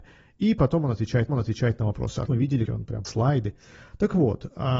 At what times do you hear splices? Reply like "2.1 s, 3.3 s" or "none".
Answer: 1.3 s, 2.3 s, 2.7 s, 3.0 s